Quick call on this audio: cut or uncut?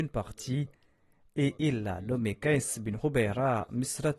uncut